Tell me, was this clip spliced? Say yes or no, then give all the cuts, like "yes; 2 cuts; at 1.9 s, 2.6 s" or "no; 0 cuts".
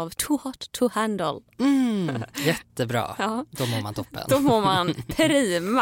no; 0 cuts